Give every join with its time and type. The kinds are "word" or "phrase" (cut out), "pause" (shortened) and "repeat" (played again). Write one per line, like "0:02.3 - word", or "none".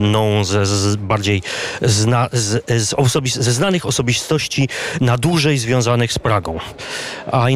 none